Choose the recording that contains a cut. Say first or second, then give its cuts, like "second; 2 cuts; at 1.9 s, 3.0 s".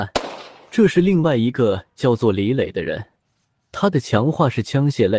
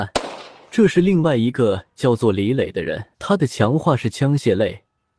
second; 1 cut; at 3.1 s